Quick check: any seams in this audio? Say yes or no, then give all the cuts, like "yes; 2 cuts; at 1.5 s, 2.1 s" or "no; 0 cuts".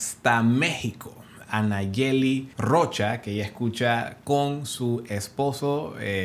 yes; 1 cut; at 2.5 s